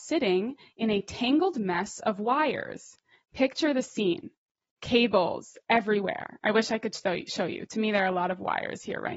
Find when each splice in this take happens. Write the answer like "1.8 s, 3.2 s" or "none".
none